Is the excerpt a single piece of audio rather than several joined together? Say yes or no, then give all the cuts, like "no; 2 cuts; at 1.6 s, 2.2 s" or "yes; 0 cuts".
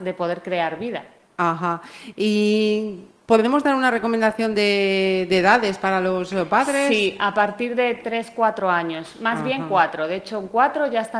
yes; 0 cuts